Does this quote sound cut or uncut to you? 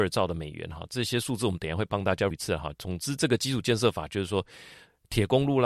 cut